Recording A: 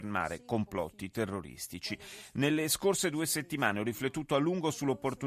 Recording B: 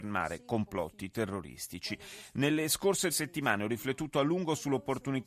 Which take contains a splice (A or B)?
B